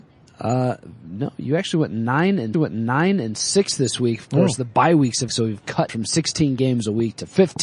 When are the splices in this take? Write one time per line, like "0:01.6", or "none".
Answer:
0:02.5
0:05.3
0:05.9